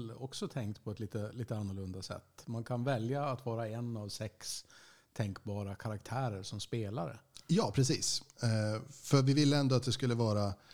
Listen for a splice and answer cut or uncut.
uncut